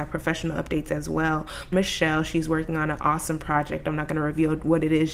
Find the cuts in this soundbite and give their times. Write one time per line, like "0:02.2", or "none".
0:01.7

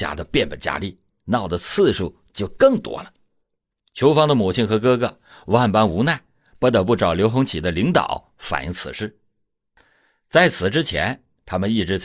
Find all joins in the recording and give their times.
none

